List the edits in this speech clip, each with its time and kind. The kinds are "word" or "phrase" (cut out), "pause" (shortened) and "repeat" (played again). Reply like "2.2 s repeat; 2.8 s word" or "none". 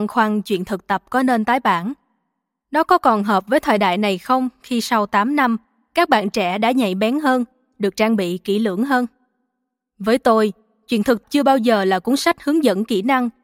11.2 s word